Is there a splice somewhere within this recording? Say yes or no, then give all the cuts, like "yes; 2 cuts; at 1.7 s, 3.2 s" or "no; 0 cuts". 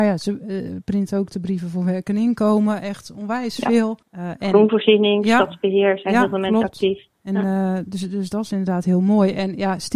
yes; 2 cuts; at 4.0 s, 7.1 s